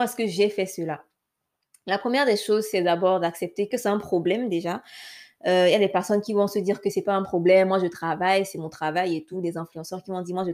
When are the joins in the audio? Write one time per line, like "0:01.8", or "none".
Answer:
none